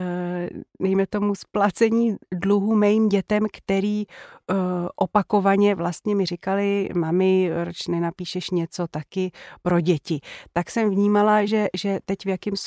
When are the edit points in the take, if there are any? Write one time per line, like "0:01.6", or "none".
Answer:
none